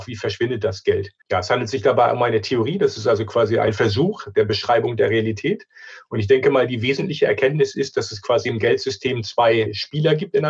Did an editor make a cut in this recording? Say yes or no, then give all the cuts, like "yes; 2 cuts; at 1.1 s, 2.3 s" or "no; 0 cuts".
yes; 1 cut; at 1.2 s